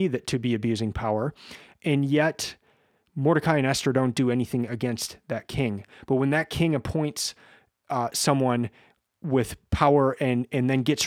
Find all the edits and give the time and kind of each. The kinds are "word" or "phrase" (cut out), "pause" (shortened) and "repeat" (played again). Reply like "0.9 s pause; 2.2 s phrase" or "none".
none